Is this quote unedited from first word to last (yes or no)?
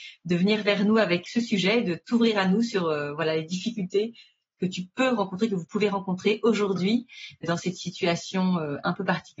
yes